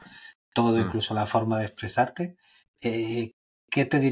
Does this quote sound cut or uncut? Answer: uncut